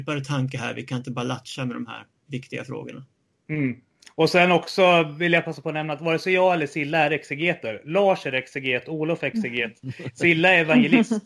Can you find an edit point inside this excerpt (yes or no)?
no